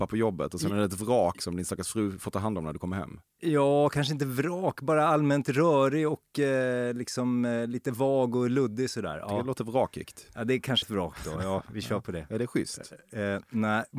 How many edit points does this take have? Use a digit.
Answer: 2